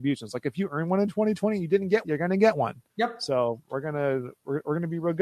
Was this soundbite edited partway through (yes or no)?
yes